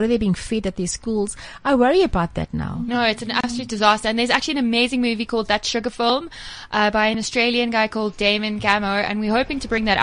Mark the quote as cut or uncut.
uncut